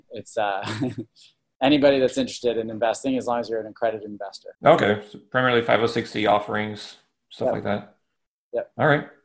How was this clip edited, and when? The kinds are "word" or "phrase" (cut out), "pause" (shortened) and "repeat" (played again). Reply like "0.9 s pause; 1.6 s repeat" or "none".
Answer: 4.5 s pause